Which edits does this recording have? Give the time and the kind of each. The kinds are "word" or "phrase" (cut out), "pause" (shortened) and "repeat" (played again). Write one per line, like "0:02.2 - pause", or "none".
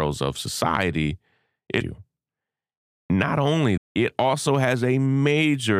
0:01.8 - word
0:03.8 - word